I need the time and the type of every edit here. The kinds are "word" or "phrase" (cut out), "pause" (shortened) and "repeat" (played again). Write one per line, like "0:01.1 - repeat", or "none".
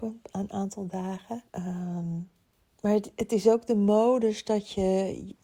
0:01.5 - pause